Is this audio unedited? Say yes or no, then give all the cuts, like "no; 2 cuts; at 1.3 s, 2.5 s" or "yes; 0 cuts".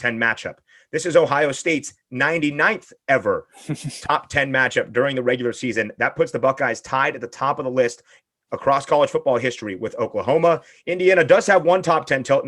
yes; 0 cuts